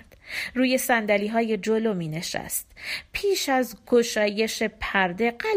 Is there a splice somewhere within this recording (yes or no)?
no